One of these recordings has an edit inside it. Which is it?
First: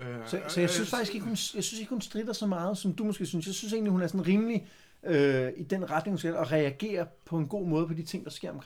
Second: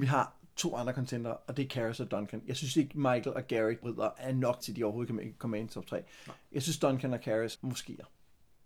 second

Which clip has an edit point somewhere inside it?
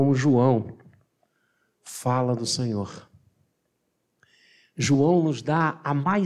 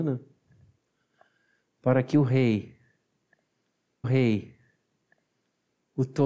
second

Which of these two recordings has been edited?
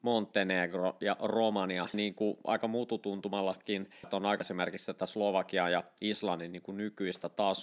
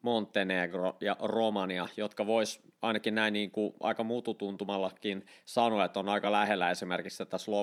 first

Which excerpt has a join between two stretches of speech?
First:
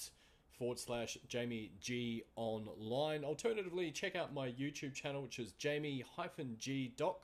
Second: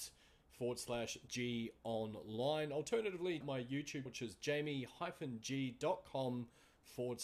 second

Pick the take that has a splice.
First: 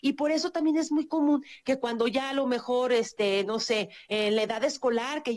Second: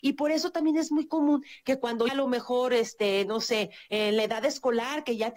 second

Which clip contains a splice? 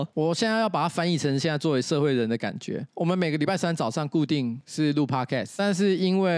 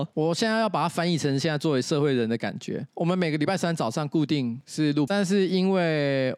second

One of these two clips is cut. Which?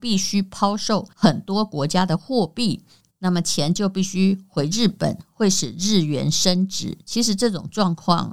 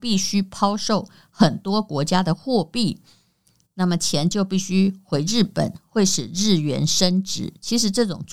first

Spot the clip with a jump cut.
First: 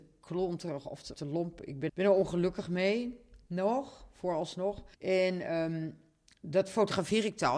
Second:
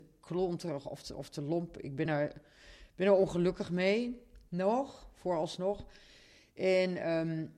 first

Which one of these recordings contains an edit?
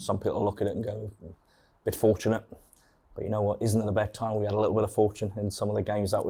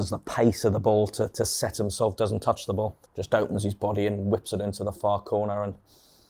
second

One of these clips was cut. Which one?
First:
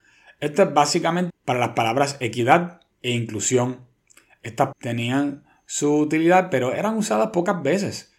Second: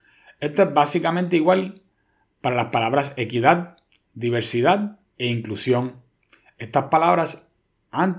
first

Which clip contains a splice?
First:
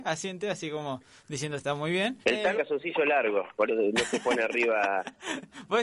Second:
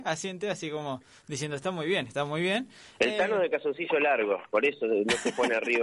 first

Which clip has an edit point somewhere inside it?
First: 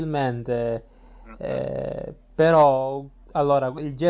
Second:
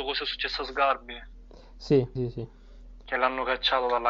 second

